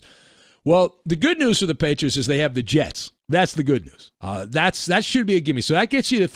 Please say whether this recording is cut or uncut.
cut